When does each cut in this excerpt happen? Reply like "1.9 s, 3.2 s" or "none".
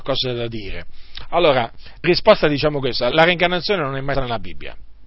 2.0 s, 3.1 s, 4.1 s